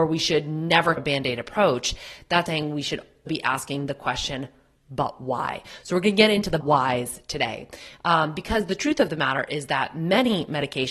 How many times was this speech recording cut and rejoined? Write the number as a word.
four